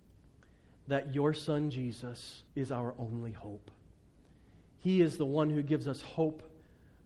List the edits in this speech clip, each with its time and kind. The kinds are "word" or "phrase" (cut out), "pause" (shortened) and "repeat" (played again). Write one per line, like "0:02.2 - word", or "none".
0:02.5 - pause